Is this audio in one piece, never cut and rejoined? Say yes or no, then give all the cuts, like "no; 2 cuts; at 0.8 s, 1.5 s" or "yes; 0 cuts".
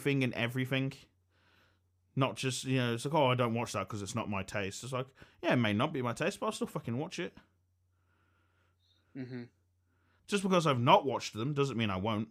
yes; 0 cuts